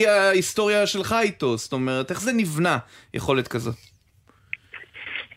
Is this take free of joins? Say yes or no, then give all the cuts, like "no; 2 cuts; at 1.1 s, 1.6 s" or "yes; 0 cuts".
yes; 0 cuts